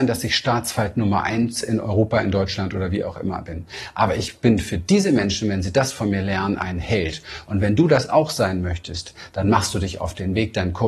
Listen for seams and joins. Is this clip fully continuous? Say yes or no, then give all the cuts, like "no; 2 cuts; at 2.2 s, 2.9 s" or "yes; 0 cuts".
yes; 0 cuts